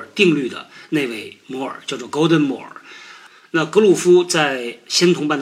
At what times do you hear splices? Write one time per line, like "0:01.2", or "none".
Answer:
none